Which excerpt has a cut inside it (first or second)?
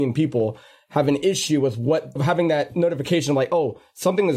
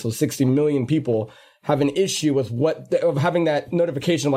first